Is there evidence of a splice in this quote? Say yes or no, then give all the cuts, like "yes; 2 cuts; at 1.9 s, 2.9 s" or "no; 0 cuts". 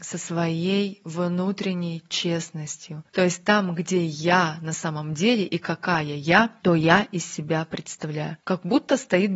yes; 1 cut; at 6.6 s